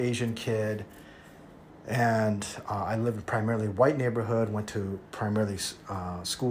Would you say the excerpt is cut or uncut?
uncut